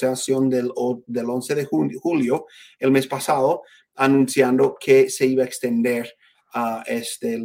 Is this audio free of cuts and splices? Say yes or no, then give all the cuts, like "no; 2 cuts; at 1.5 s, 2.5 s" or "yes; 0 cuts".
yes; 0 cuts